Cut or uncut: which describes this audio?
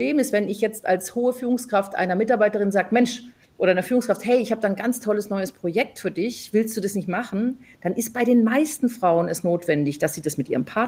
uncut